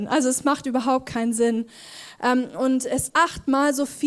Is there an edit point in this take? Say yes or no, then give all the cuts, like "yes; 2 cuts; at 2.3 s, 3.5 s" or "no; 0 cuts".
yes; 1 cut; at 3.1 s